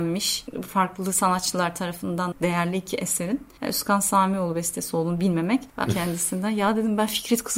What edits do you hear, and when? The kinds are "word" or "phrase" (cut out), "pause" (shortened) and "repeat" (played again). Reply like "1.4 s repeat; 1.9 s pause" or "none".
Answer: 2.3 s phrase; 3.6 s pause; 5.9 s phrase